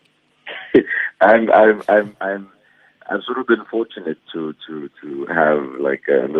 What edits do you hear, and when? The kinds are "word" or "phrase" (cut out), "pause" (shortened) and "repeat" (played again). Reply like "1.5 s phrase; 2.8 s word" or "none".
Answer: none